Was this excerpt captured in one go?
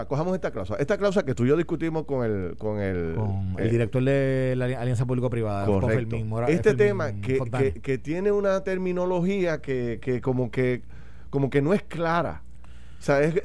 yes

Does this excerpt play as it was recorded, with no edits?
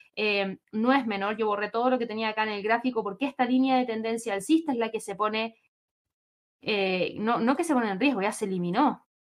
yes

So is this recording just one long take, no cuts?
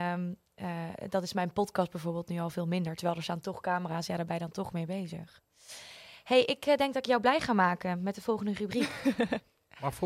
yes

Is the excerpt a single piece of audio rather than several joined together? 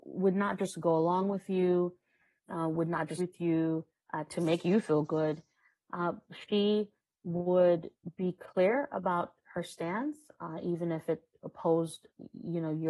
no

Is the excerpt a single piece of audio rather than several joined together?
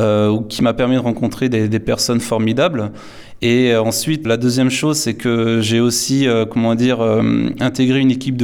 no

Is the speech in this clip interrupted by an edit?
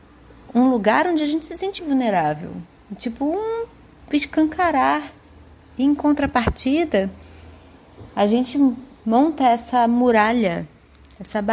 yes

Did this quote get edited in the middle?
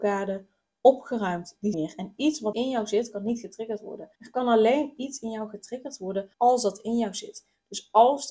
yes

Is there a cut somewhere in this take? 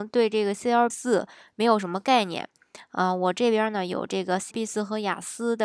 yes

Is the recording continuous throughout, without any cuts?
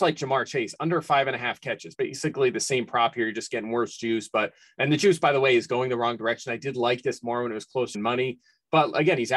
no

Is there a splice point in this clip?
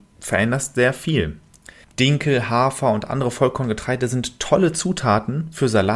yes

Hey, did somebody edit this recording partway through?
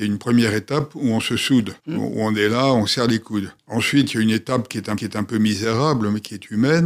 yes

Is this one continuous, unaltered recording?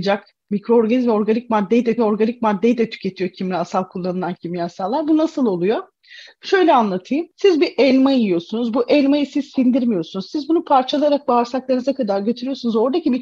no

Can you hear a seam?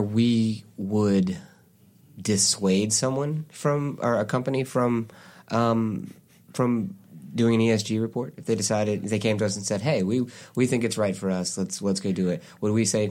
no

